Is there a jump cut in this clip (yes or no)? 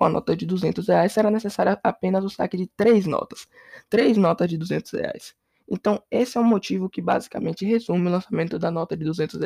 no